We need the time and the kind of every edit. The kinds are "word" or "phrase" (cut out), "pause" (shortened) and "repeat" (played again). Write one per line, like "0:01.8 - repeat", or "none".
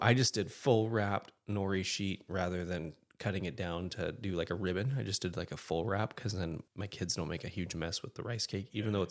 0:06.7 - pause